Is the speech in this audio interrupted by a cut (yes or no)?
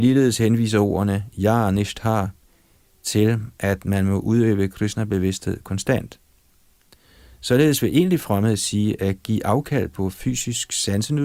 no